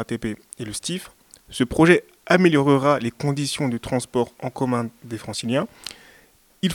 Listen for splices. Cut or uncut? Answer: uncut